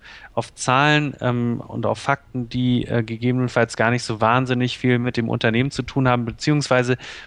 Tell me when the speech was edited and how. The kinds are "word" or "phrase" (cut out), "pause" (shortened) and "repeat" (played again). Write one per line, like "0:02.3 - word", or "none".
none